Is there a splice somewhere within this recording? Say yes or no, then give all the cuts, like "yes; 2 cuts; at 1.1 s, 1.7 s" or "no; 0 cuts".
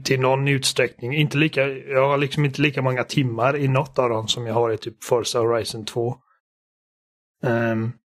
no; 0 cuts